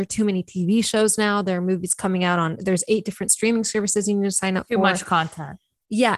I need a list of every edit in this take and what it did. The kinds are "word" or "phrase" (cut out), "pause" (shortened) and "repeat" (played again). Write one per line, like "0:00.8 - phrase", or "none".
none